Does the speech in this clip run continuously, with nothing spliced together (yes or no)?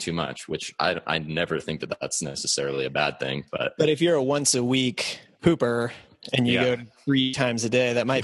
yes